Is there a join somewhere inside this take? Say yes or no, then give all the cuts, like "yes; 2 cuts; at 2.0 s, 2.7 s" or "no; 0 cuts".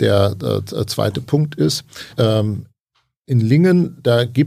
yes; 1 cut; at 2.1 s